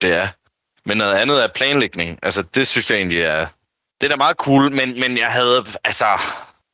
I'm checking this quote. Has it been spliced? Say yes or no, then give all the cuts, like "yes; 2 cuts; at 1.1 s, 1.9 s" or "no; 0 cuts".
no; 0 cuts